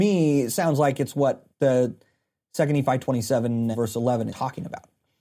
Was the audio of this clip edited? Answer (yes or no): yes